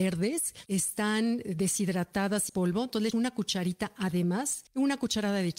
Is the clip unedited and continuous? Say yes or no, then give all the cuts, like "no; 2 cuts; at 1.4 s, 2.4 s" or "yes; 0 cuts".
no; 3 cuts; at 2.5 s, 3.1 s, 4.7 s